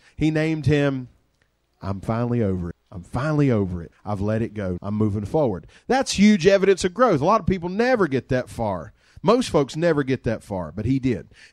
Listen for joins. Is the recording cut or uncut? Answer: cut